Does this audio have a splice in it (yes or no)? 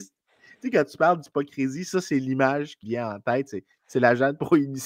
yes